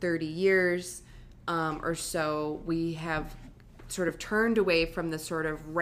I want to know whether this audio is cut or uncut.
uncut